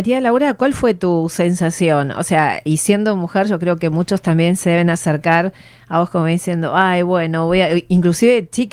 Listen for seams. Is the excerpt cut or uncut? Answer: uncut